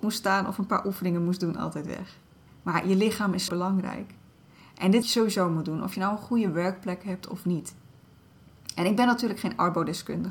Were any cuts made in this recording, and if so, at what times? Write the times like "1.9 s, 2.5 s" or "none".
3.5 s, 5.0 s